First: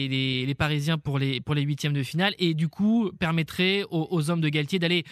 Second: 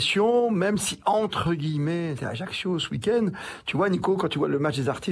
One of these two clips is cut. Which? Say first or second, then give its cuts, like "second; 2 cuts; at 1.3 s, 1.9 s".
second; 1 cut; at 2.2 s